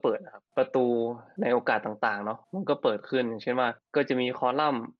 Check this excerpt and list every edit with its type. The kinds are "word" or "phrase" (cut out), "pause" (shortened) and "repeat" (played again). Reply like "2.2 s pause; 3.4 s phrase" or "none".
2.4 s pause